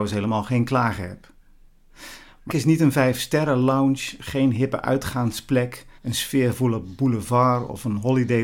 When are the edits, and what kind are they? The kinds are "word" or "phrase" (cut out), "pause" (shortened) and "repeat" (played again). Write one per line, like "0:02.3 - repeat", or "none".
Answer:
0:02.5 - phrase
0:06.0 - pause